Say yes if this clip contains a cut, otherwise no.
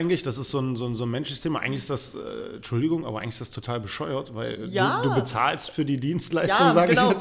no